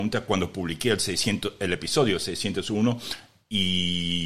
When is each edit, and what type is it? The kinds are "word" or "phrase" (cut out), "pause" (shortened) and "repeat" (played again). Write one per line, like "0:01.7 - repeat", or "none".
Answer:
none